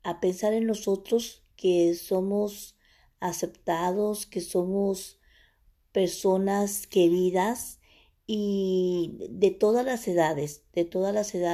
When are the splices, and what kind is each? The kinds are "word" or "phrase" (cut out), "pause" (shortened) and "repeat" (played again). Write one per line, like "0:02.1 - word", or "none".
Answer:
none